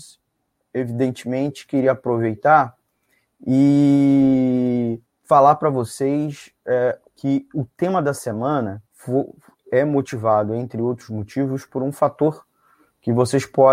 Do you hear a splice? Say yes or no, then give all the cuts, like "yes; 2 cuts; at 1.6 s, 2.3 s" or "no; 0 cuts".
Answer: yes; 3 cuts; at 5.1 s, 7.1 s, 8.9 s